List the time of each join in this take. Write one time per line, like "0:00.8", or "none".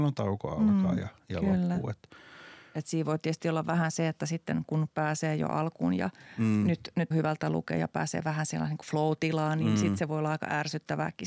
0:07.1